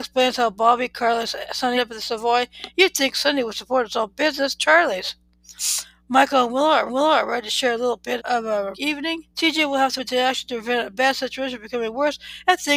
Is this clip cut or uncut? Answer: cut